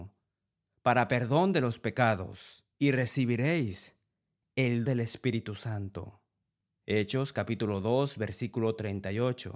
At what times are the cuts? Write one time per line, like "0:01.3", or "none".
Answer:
0:02.7
0:04.9